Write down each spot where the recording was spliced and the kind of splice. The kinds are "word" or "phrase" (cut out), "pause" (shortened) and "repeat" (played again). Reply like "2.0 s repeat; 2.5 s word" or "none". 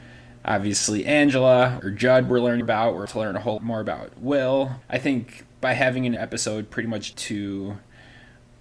1.8 s word; 2.6 s word; 3.1 s word; 3.6 s word; 4.8 s word; 6.2 s word; 7.1 s word